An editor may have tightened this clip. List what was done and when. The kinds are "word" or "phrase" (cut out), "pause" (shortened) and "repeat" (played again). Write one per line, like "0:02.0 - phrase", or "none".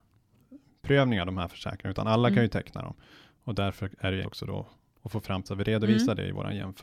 0:04.2 - word
0:05.4 - word